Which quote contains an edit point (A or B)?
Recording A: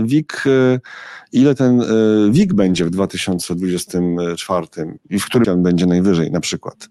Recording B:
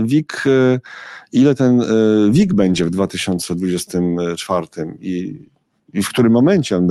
A